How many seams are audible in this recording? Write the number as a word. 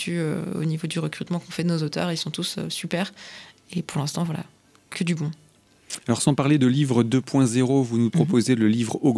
zero